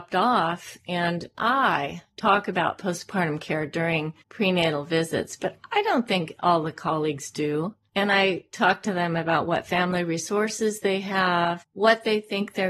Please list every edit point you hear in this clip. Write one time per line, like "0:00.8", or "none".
0:04.2